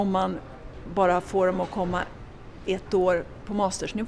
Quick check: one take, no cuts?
yes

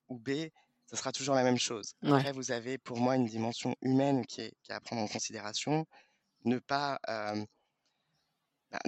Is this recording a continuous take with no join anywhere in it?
yes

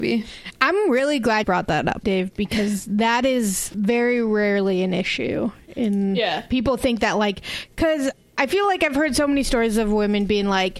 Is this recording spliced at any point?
yes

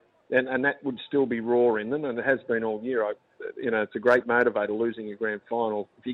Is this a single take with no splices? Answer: yes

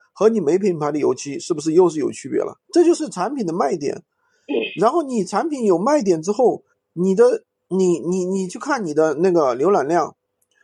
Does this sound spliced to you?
yes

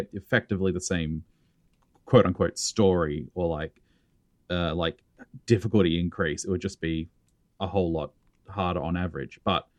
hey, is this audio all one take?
yes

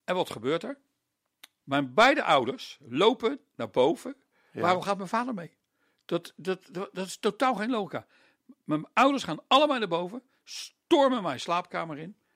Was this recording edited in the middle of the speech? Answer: no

